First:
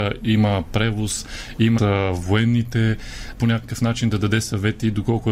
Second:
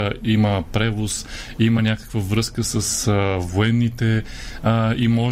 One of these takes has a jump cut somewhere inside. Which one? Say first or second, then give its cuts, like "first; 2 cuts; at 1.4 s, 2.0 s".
first; 2 cuts; at 1.8 s, 3.3 s